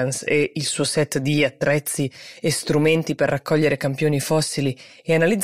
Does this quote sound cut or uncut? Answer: uncut